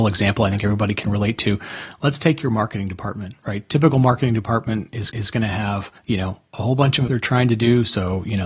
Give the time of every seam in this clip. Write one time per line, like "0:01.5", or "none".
0:05.1
0:06.0
0:07.1